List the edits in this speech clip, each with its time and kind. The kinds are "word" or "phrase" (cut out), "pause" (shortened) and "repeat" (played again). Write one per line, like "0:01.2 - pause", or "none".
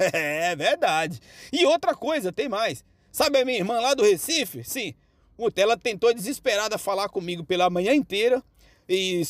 none